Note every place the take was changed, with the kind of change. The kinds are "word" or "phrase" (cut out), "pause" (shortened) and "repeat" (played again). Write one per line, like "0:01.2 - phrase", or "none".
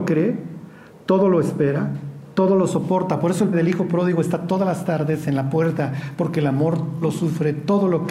0:03.5 - word
0:07.0 - word